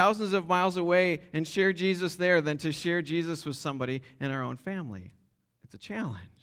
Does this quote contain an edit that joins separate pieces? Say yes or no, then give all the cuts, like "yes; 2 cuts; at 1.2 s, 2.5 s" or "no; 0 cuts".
no; 0 cuts